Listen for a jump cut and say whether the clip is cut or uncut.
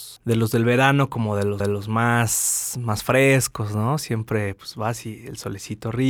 cut